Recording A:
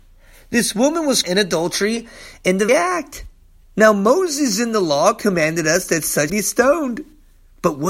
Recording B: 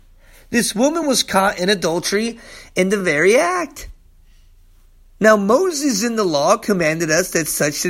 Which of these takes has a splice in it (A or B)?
A